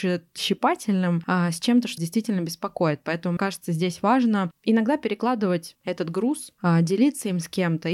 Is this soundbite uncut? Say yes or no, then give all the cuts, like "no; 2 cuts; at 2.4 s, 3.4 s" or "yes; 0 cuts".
no; 3 cuts; at 2.0 s, 3.4 s, 5.7 s